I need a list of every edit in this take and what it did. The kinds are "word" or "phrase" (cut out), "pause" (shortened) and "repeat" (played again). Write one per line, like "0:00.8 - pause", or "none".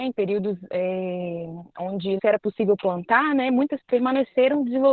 0:02.2 - word
0:03.8 - word